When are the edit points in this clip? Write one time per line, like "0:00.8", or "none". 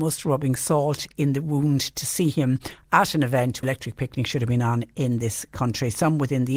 0:03.6